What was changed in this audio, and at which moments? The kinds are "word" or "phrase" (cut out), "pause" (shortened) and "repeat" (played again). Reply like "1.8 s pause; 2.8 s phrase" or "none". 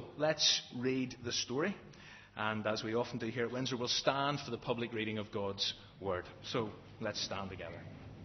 none